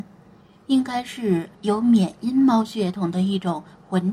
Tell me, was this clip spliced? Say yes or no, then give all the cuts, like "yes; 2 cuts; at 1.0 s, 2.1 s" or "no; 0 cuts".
yes; 1 cut; at 1.5 s